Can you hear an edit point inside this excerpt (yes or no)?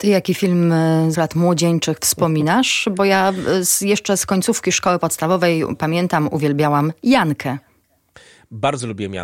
yes